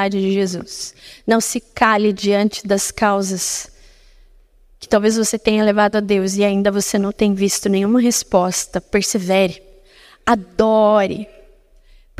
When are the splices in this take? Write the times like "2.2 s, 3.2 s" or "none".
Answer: none